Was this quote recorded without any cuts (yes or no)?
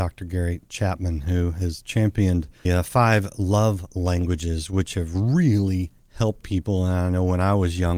no